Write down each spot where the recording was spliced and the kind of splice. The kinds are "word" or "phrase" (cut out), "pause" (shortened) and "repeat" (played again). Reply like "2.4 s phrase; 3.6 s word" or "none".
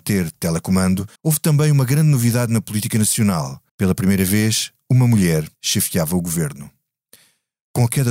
1.2 s pause; 3.7 s pause; 5.5 s pause